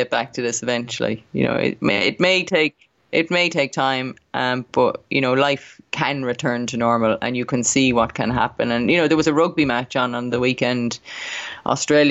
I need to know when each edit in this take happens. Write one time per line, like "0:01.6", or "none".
0:03.0